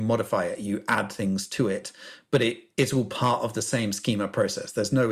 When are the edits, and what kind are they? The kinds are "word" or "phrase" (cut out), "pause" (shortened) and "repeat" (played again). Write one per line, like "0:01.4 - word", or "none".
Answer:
none